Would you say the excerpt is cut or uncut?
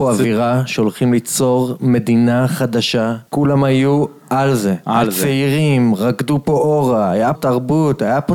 cut